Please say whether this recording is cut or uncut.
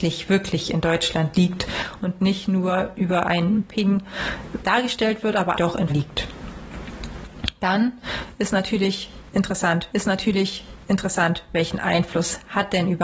cut